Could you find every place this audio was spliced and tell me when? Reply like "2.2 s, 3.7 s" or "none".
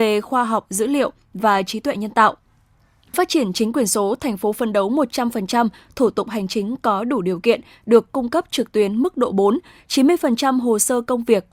3.1 s

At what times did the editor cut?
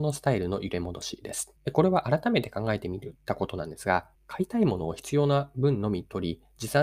1.6 s, 3.2 s, 4.1 s

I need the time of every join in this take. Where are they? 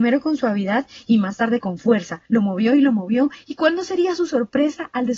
2.3 s

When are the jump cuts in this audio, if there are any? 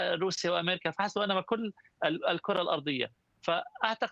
none

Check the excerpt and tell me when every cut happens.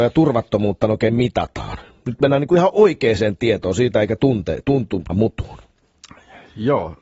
5.1 s

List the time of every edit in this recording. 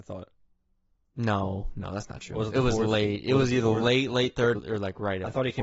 4.5 s

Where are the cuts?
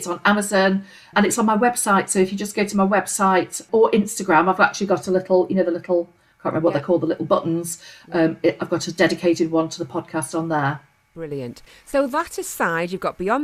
1.1 s, 3.7 s

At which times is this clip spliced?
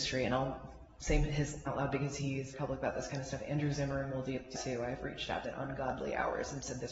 1.7 s, 2.5 s, 4.5 s, 5.4 s

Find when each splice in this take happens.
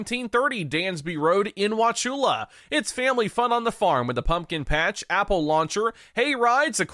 none

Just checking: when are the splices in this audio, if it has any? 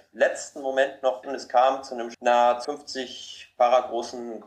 1.2 s, 2.1 s, 2.6 s

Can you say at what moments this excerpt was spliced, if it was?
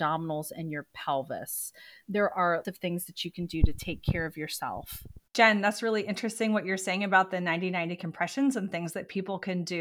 2.0 s, 2.6 s, 5.3 s

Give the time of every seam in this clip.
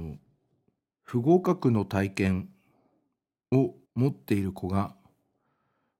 3.8 s

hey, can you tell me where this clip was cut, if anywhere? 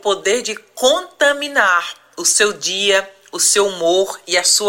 none

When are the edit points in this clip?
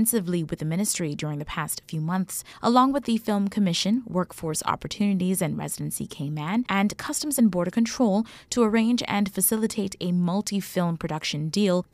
none

